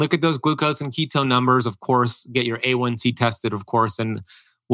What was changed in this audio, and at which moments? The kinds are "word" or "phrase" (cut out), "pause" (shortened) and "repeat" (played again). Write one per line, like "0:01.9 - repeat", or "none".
none